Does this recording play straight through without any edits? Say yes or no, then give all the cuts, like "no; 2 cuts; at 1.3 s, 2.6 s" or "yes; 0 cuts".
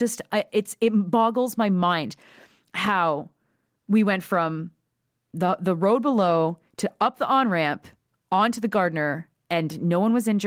yes; 0 cuts